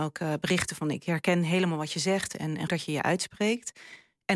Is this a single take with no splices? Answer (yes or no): no